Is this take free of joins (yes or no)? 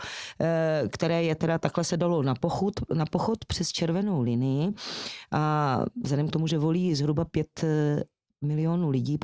yes